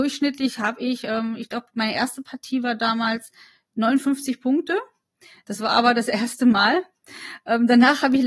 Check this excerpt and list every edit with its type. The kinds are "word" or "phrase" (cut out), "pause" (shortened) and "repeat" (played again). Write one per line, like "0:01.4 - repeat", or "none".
none

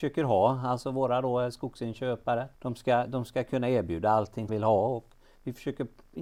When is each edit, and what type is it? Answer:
0:02.5 - pause
0:04.5 - word

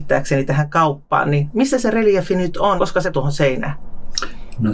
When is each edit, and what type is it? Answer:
0:02.8 - word
0:03.1 - word

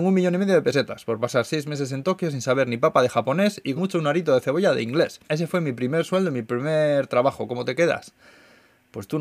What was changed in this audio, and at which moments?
0:03.8 - word
0:05.2 - pause

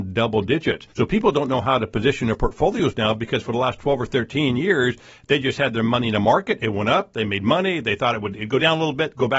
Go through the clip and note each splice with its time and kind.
0:00.9 - pause

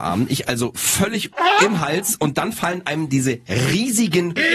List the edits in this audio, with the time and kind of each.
0:01.3 - phrase

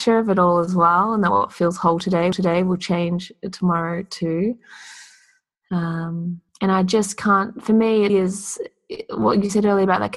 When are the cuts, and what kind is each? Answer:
0:02.3 - repeat
0:06.5 - pause
0:08.1 - word

